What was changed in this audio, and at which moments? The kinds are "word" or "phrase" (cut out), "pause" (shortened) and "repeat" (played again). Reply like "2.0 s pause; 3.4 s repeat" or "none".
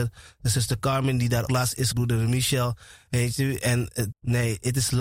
1.5 s word; 1.9 s word; 4.1 s word